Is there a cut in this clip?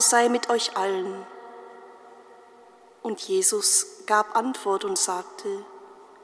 no; 0 cuts

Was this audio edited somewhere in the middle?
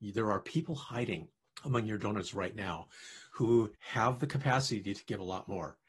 yes; 2 cuts; at 1.4 s, 3.8 s

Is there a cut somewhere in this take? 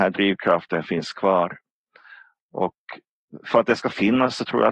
no; 0 cuts

